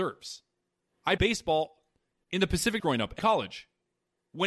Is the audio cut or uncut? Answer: cut